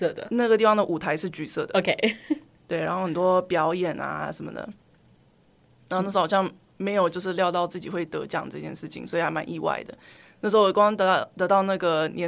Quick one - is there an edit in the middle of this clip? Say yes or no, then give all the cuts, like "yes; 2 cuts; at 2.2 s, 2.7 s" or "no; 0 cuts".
no; 0 cuts